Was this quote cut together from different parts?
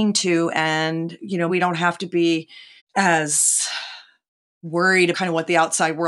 yes; 3 cuts; at 1.5 s, 2.8 s, 5.1 s

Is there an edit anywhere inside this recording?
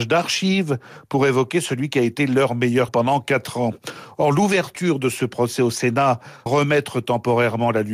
yes; 2 cuts; at 2.9 s, 6.5 s

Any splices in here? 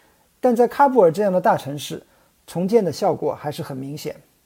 no; 0 cuts

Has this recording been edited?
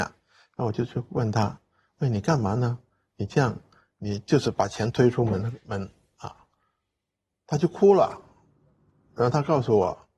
no; 0 cuts

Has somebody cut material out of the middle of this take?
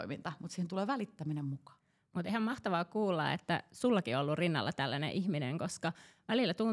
no; 0 cuts

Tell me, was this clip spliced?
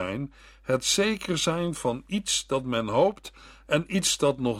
no; 0 cuts

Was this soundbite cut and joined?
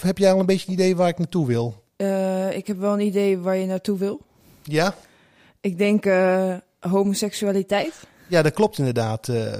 yes; 1 cut; at 1.9 s

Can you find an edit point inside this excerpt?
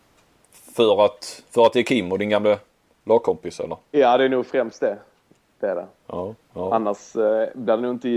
no; 0 cuts

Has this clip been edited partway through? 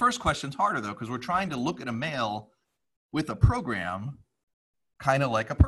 no; 0 cuts

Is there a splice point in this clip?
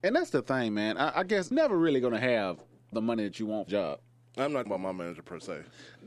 yes; 5 cuts; at 1.1 s, 1.5 s, 2.9 s, 3.7 s, 4.7 s

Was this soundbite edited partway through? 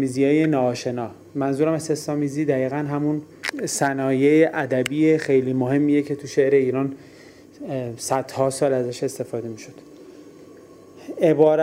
no; 0 cuts

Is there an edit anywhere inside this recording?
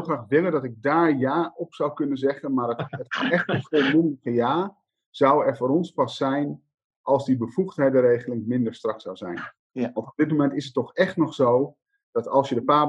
no; 0 cuts

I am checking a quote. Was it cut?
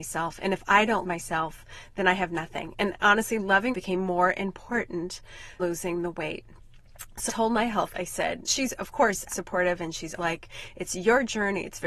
yes; 8 cuts; at 1.0 s, 3.7 s, 5.6 s, 7.3 s, 7.9 s, 8.5 s, 9.3 s, 10.2 s

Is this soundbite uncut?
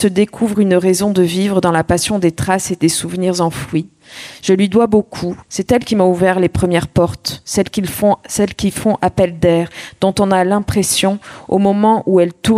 no; 1 cut; at 5.4 s

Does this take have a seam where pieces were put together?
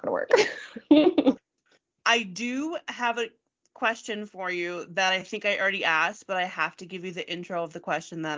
no; 0 cuts

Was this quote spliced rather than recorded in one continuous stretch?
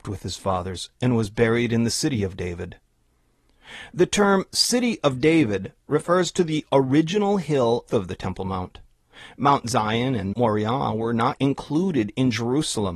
yes; 3 cuts; at 7.9 s, 10.3 s, 11.4 s

